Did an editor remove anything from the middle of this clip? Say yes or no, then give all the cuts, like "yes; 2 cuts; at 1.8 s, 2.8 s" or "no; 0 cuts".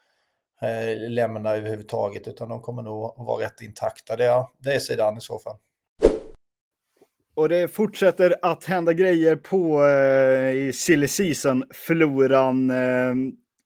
no; 0 cuts